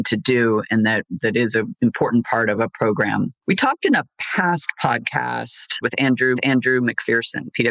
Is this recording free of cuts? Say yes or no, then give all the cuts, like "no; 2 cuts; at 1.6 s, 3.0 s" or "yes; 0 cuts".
no; 3 cuts; at 3.4 s, 5.8 s, 6.3 s